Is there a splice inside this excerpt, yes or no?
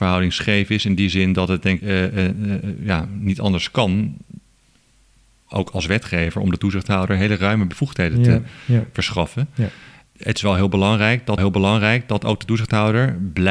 yes